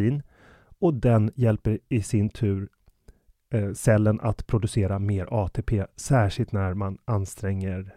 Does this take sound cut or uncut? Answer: uncut